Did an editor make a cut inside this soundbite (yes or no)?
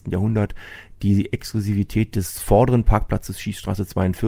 no